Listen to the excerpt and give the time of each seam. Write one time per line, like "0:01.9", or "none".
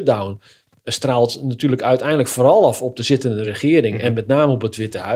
none